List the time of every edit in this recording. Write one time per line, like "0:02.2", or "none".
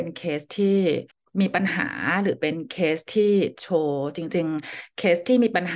0:01.1